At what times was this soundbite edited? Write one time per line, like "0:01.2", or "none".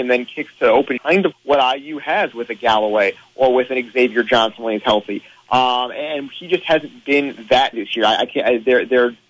0:01.0
0:01.3
0:07.7